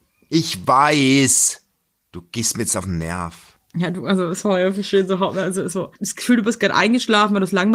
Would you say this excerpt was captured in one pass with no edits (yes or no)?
no